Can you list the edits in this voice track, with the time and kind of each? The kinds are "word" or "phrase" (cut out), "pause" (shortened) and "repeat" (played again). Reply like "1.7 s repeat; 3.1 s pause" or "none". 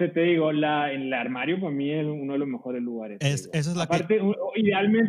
none